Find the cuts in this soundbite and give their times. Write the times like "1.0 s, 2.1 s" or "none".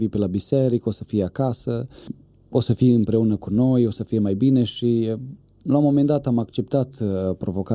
none